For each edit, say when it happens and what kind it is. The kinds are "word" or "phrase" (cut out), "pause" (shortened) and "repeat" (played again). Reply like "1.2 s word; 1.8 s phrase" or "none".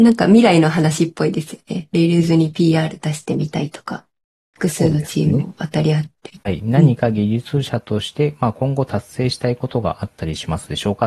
none